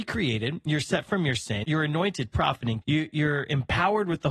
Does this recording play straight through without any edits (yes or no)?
no